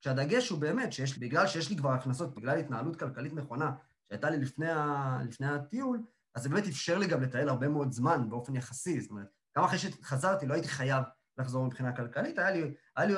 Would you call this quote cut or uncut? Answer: cut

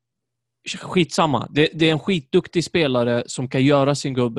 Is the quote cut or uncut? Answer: uncut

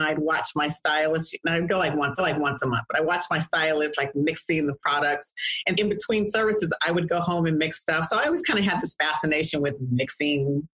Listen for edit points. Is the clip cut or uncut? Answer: cut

